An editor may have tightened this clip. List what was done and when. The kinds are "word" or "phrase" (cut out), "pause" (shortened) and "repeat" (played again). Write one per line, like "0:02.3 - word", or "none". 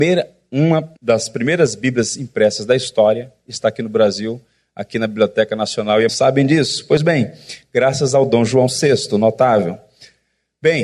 0:01.0 - pause
0:06.1 - phrase